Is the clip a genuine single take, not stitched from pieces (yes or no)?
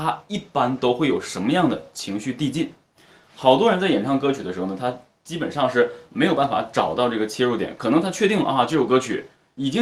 yes